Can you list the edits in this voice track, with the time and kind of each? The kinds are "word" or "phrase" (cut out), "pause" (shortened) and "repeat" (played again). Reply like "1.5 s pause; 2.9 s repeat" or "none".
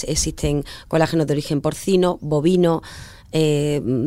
none